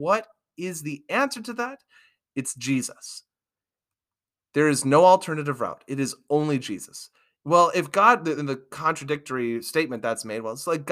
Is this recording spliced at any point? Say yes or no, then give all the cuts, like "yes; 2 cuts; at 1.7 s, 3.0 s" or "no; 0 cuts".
no; 0 cuts